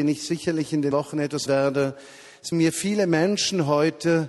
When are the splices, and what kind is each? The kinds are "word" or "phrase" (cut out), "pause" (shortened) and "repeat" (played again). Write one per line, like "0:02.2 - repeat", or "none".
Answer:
0:00.9 - word
0:01.5 - word
0:02.5 - word